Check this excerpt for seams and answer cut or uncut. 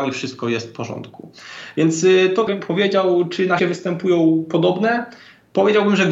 cut